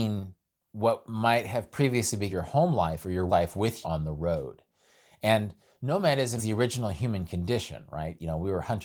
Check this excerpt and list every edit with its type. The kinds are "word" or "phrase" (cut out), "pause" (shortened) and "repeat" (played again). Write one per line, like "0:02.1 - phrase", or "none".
0:02.3 - word
0:03.3 - word
0:03.8 - word
0:06.4 - word